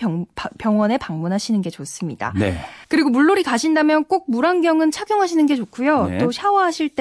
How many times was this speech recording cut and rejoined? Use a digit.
1